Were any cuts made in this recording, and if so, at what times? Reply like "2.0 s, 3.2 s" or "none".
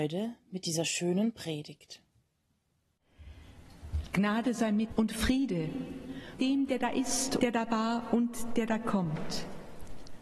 4.9 s, 6.4 s, 7.4 s